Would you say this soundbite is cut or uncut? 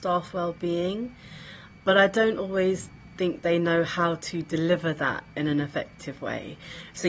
uncut